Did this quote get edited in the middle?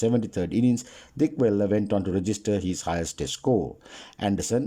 no; 0 cuts

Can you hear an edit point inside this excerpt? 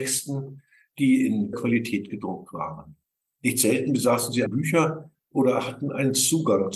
yes; 2 cuts; at 1.5 s, 4.5 s

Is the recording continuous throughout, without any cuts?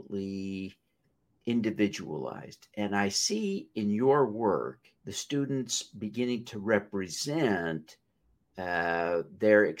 no; 1 cut; at 5.0 s

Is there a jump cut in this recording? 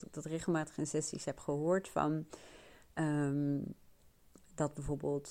no; 0 cuts

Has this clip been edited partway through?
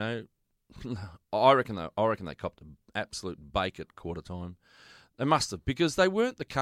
no; 0 cuts

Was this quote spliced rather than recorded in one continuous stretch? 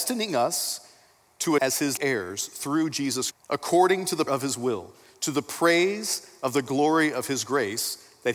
yes; 4 cuts; at 1.6 s, 2.0 s, 3.3 s, 4.3 s

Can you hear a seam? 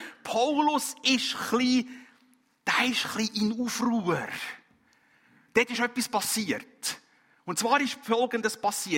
no; 0 cuts

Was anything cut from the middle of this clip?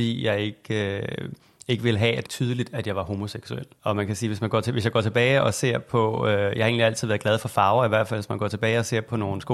yes; 1 cut; at 2.3 s

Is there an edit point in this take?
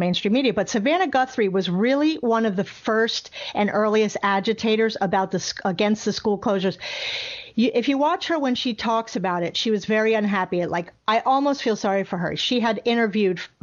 no; 0 cuts

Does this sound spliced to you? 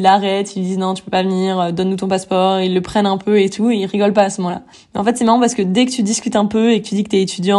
yes; 1 cut; at 4.7 s

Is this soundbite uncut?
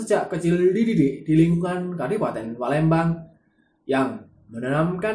yes; 0 cuts

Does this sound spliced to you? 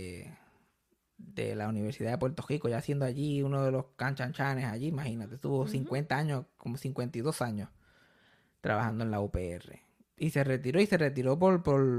no; 0 cuts

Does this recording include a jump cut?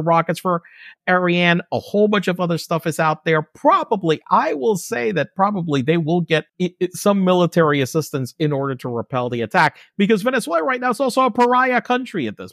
yes; 1 cut; at 6.5 s

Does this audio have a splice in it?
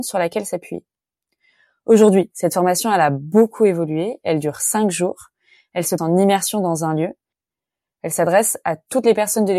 yes; 1 cut; at 6.0 s

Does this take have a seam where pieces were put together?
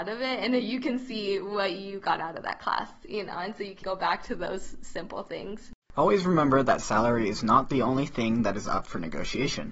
yes; 2 cuts; at 3.8 s, 5.8 s

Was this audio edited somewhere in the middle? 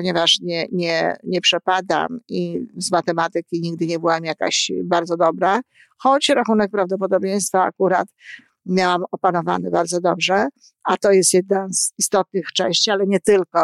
no; 0 cuts

